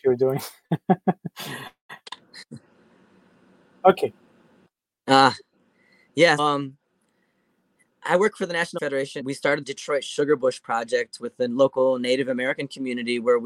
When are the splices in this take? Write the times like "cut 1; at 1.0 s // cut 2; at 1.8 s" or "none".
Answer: cut 1; at 6.4 s // cut 2; at 8.8 s // cut 3; at 9.2 s // cut 4; at 9.6 s